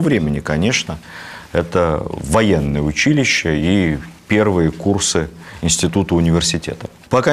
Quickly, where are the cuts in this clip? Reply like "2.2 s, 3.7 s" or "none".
none